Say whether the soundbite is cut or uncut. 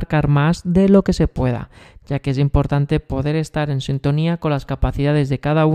uncut